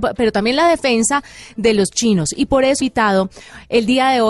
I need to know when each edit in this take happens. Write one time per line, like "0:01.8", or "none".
0:02.8